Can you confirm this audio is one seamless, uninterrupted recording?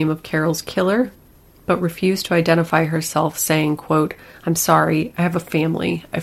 yes; 0 cuts

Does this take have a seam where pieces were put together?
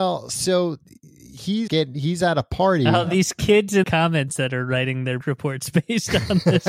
yes; 3 cuts; at 1.7 s, 3.8 s, 5.2 s

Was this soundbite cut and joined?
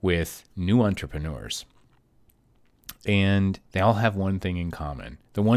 yes; 1 cut; at 3.7 s

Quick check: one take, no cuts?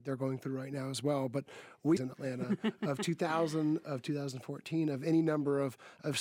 no; 1 cut; at 2.0 s

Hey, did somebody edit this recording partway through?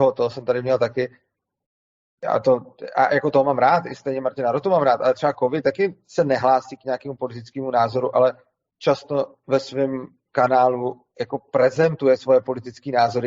no; 0 cuts

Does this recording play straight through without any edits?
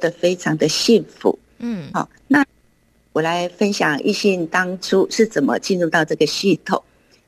yes; 0 cuts

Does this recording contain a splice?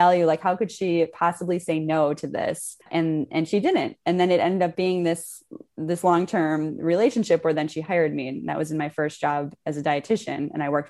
yes; 1 cut; at 2.8 s

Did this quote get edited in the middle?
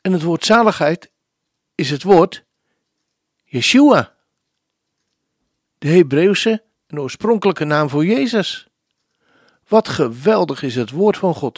no; 0 cuts

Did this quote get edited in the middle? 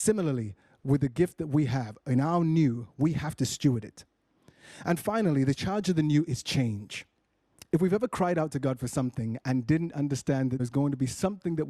yes; 1 cut; at 10.6 s

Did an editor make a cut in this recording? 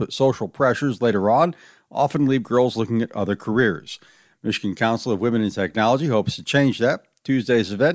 no; 0 cuts

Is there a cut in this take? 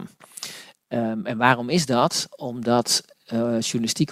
no; 0 cuts

